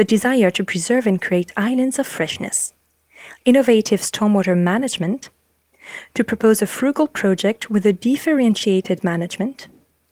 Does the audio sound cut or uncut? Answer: uncut